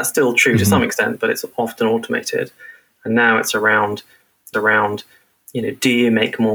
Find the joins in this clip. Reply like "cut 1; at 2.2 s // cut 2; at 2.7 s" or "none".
cut 1; at 4.5 s